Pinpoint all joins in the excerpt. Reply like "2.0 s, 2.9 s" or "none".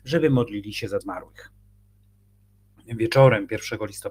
1.0 s

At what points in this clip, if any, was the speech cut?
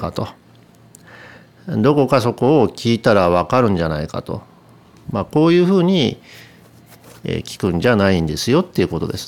none

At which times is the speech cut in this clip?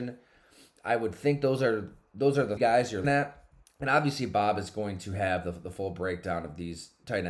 2.6 s, 3.0 s

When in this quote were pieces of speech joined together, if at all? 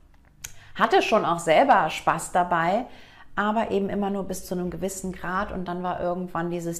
none

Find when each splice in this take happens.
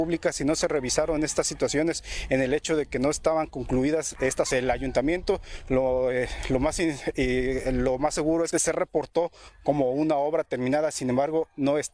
4.5 s, 8.5 s

